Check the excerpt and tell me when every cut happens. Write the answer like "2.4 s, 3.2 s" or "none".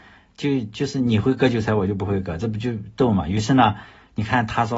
none